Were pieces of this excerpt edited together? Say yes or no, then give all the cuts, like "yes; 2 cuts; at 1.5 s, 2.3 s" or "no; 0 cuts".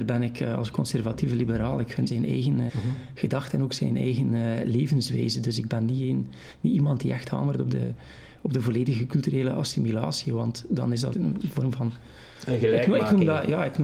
yes; 3 cuts; at 2.1 s, 2.7 s, 11.1 s